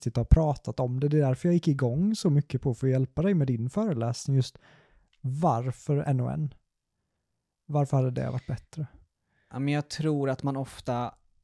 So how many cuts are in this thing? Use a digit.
1